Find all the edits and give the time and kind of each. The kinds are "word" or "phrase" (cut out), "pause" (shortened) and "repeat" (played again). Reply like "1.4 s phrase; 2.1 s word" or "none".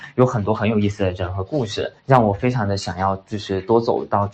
2.0 s pause